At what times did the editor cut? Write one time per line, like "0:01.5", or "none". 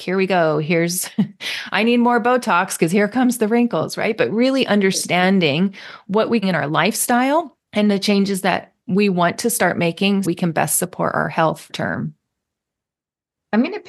0:06.4
0:07.6
0:08.8
0:10.2
0:11.7